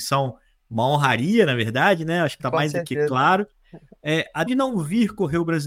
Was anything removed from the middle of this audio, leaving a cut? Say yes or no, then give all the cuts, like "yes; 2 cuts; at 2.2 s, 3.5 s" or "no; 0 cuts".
yes; 2 cuts; at 2.4 s, 4.5 s